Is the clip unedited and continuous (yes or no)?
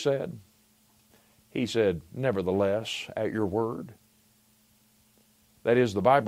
yes